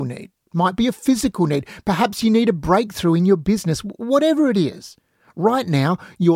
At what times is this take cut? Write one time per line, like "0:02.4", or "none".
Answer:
none

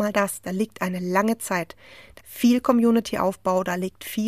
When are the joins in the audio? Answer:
0:02.2

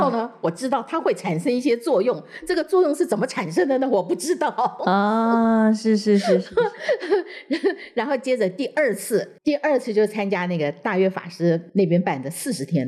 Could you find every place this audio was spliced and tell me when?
0:09.4
0:11.7

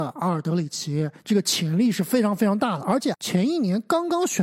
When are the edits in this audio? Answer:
0:01.2
0:03.1

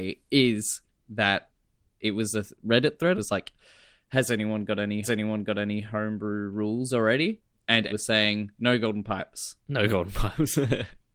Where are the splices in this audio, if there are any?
0:03.1
0:05.0
0:07.9
0:09.6

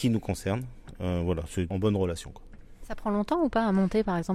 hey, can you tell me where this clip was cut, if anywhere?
0:01.7

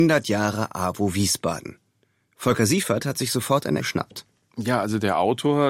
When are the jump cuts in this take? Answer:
0:03.8

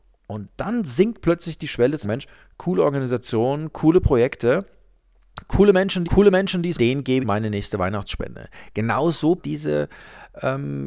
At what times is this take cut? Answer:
0:02.0
0:06.0
0:06.8
0:07.2
0:09.4

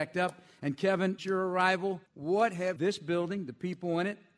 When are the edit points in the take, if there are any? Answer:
0:01.2
0:02.1
0:02.8

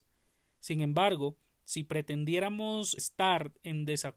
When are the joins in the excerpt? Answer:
0:03.0

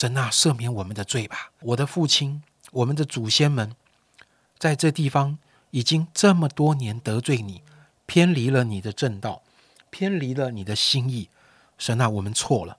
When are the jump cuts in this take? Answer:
0:01.6

